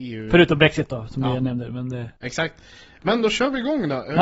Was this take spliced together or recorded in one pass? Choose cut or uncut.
cut